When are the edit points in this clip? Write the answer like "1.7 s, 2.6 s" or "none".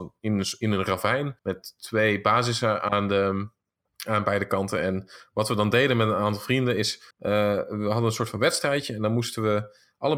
1.4 s, 7.1 s